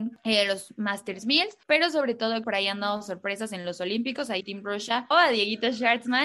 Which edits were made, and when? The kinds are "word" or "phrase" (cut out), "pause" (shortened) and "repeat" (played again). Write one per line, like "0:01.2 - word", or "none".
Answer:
0:01.6 - pause
0:02.4 - phrase
0:04.4 - word
0:05.1 - word